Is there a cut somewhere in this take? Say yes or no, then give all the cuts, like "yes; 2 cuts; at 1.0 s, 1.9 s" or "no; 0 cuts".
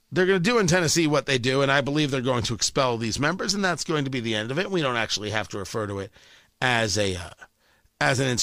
no; 0 cuts